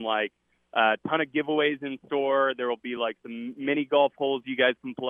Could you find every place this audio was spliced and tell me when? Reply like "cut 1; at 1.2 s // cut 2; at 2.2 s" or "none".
none